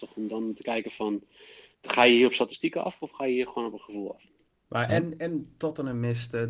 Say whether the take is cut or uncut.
cut